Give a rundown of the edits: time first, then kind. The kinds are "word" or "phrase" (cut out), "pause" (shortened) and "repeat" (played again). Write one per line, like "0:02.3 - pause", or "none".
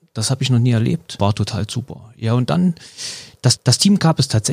0:03.6 - repeat